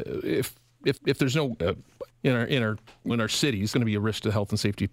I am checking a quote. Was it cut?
yes; 4 cuts; at 1.0 s, 2.1 s, 3.1 s, 3.7 s

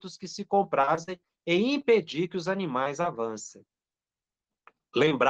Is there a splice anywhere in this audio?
no; 0 cuts

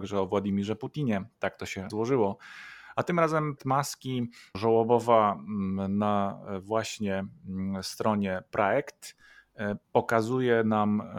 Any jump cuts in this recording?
yes; 4 cuts; at 1.9 s, 3.6 s, 4.5 s, 9.8 s

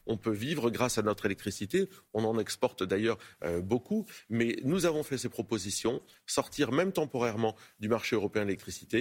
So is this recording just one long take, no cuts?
yes; 0 cuts

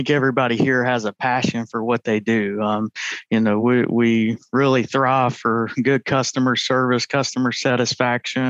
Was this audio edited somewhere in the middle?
no; 0 cuts

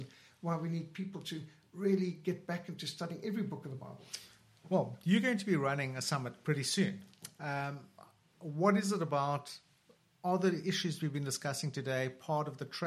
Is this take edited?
no; 0 cuts

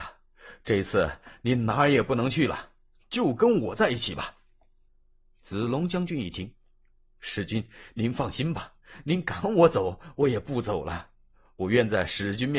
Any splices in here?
no; 0 cuts

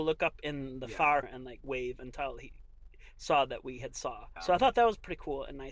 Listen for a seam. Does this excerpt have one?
yes; 2 cuts; at 1.2 s, 4.4 s

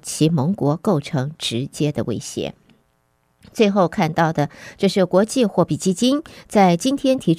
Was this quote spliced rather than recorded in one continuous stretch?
no; 0 cuts

